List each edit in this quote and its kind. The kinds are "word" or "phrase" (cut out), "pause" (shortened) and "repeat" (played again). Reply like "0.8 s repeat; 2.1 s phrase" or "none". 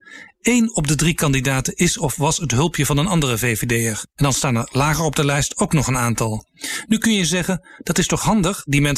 4.1 s pause